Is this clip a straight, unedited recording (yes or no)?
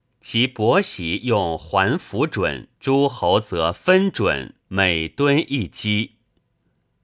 no